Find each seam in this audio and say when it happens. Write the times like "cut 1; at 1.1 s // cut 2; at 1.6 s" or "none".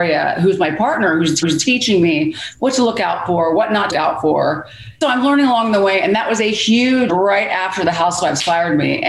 cut 1; at 1.4 s // cut 2; at 3.9 s // cut 3; at 5.0 s // cut 4; at 7.1 s